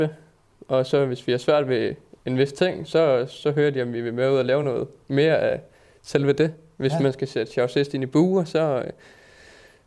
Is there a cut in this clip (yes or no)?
no